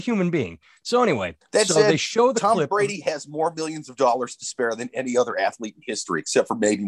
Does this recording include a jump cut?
yes; 1 cut; at 1.4 s

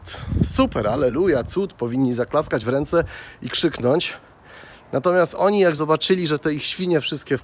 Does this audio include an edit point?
no; 0 cuts

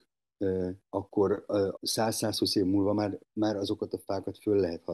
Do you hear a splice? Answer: yes; 2 cuts; at 1.8 s, 3.2 s

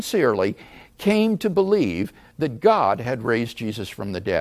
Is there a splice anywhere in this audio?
no; 0 cuts

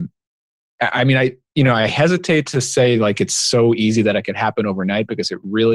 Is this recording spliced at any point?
no; 0 cuts

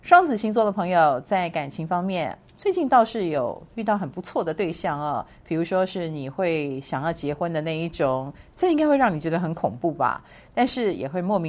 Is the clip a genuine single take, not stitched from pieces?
yes; 0 cuts

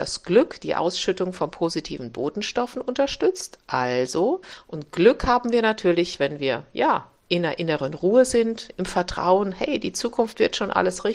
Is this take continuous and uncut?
yes; 0 cuts

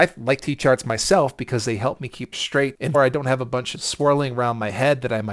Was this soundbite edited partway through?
yes; 3 cuts; at 2.3 s, 2.9 s, 3.7 s

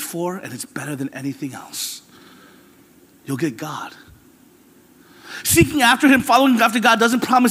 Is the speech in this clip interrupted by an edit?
no; 0 cuts

